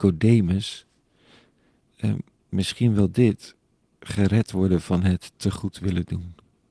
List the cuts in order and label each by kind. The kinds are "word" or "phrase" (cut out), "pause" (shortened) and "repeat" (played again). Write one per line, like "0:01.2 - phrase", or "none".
none

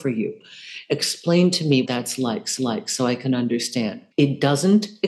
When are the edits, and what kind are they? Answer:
0:01.8 - word
0:02.6 - repeat
0:04.1 - pause

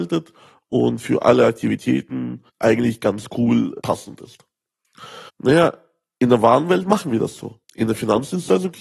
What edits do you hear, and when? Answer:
0:02.5 - pause
0:05.3 - pause
0:07.6 - pause

